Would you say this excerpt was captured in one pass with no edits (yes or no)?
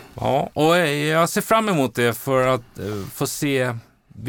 yes